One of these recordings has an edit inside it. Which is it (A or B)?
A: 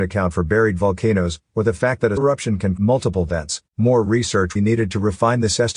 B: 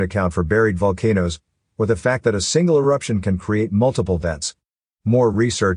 A